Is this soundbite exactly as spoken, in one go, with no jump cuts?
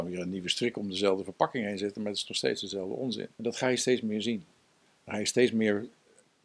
no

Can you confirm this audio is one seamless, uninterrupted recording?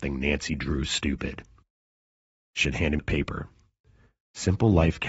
no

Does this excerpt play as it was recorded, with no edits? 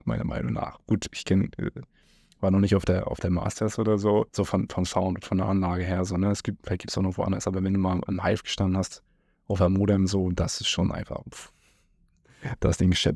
no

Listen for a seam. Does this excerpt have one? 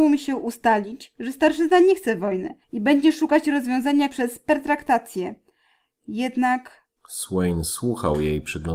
yes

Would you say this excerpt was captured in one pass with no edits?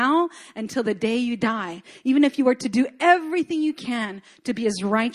yes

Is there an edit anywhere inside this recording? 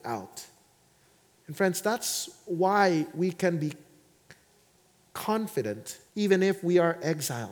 yes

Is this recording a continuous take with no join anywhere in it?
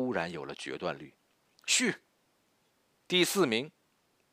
yes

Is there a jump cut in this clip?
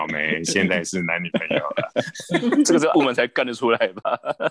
yes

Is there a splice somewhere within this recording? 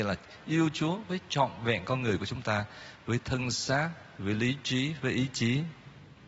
no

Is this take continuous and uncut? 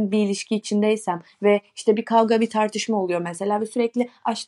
yes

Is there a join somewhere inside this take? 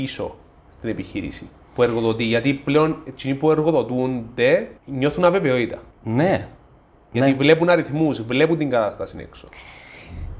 yes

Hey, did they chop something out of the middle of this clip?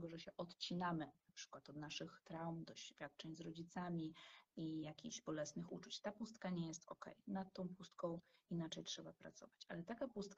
no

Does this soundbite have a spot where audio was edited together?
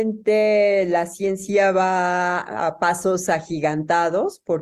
no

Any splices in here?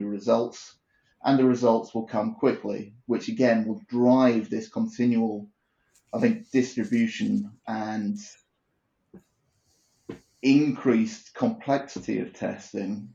no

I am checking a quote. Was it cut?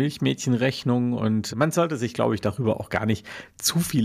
yes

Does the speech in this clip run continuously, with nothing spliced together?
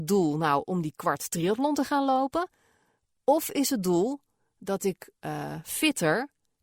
yes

